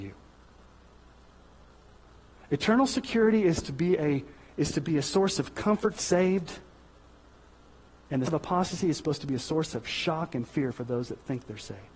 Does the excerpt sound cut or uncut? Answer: cut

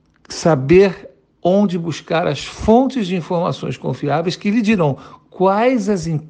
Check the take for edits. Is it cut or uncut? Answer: uncut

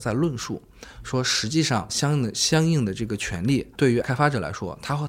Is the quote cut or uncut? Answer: cut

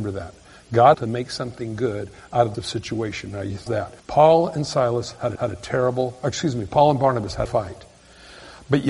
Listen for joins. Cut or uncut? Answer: cut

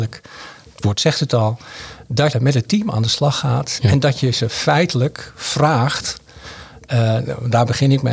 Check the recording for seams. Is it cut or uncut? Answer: cut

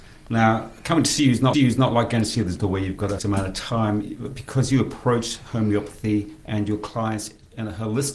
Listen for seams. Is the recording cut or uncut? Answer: cut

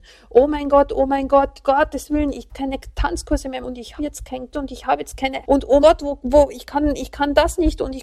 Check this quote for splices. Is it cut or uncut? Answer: cut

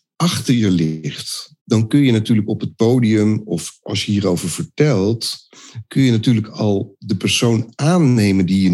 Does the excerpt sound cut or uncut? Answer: cut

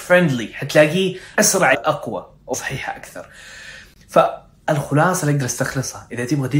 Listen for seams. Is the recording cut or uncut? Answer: cut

